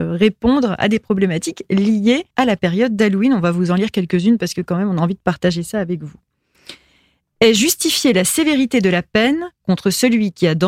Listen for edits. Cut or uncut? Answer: cut